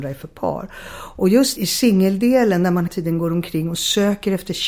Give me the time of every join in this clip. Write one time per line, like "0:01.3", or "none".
0:01.6
0:02.9